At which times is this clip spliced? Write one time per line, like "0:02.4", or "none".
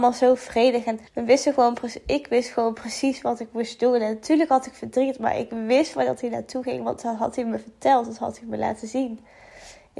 0:01.1